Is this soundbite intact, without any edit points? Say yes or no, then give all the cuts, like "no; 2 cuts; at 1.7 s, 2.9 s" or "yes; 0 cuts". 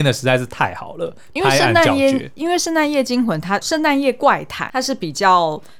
no; 2 cuts; at 3.6 s, 4.7 s